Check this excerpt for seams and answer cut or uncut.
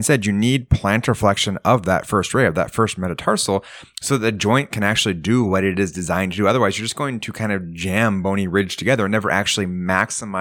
uncut